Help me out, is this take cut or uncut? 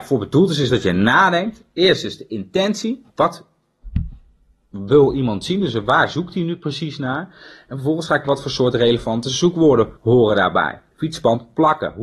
cut